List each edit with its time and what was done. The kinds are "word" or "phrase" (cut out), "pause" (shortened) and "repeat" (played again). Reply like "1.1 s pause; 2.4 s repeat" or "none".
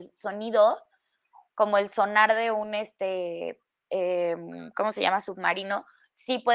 3.7 s pause